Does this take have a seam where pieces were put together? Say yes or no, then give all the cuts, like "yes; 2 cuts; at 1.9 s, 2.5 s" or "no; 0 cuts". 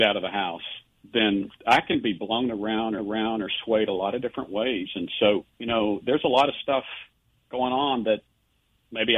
yes; 3 cuts; at 1.6 s, 3.0 s, 5.5 s